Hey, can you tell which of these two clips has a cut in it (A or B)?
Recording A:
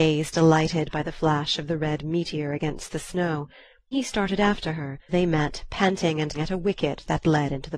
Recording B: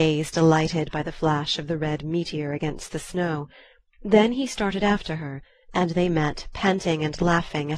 A